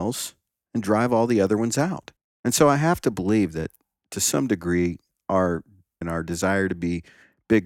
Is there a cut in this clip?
yes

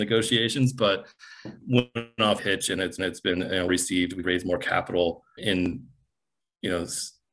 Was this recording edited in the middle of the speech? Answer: yes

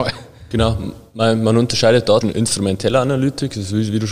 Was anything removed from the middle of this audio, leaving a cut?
yes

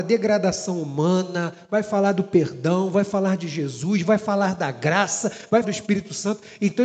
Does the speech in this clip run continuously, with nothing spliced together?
no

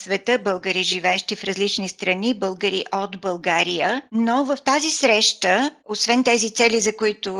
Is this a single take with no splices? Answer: no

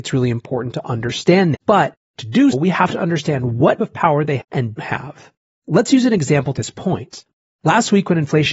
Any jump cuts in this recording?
yes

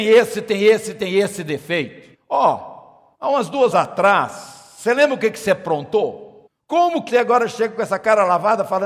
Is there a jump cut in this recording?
yes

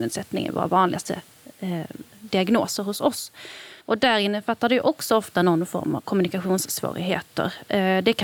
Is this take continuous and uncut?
no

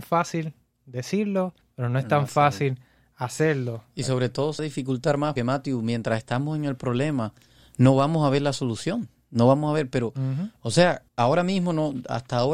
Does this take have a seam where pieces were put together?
yes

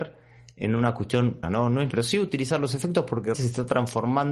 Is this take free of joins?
no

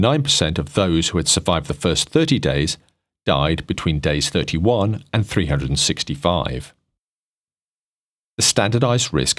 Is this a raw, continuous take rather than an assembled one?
yes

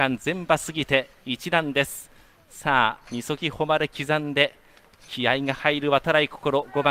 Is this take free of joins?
yes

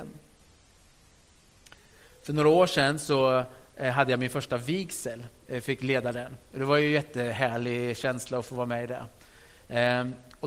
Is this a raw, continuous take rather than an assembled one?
yes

